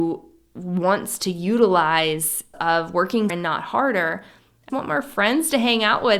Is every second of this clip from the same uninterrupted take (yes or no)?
no